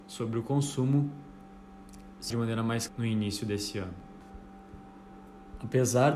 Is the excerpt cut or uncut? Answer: cut